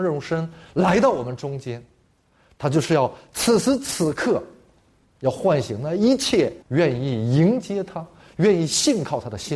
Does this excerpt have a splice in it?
yes; 1 cut; at 6.6 s

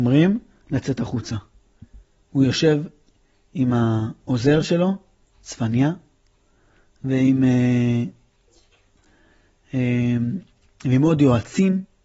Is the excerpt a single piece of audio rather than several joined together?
yes; 0 cuts

